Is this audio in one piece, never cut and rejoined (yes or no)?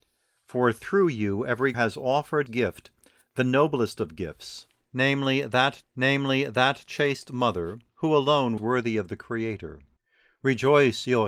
no